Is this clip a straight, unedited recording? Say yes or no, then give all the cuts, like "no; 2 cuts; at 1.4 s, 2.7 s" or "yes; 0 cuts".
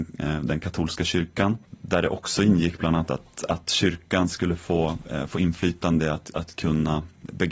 yes; 0 cuts